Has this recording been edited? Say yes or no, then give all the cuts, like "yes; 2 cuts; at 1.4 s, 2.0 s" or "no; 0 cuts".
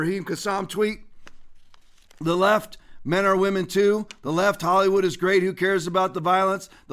no; 0 cuts